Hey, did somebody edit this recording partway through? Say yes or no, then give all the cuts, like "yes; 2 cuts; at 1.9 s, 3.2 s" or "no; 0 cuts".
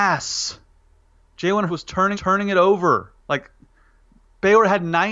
yes; 3 cuts; at 1.7 s, 2.1 s, 3.2 s